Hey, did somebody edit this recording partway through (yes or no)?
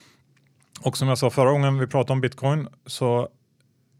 yes